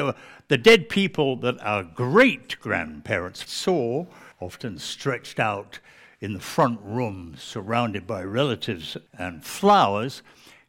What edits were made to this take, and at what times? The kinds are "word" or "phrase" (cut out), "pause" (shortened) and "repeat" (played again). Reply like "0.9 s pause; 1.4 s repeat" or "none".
3.5 s word; 4.3 s pause; 9.1 s pause